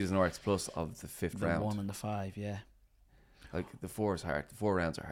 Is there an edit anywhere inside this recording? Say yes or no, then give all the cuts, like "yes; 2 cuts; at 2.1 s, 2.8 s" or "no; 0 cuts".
no; 0 cuts